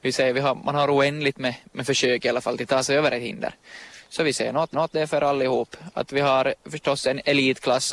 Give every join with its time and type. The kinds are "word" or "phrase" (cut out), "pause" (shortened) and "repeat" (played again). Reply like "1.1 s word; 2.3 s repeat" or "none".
4.7 s repeat